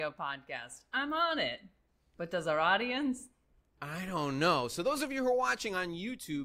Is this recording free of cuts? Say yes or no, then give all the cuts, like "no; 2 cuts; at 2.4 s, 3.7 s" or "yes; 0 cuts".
yes; 0 cuts